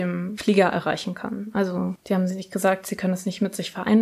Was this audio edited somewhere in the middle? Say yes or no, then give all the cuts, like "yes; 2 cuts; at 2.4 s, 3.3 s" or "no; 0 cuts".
no; 0 cuts